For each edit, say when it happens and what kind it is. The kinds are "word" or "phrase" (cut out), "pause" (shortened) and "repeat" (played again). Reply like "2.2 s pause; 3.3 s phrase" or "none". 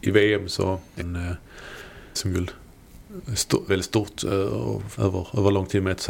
1.0 s word; 2.2 s word; 3.7 s word; 5.0 s word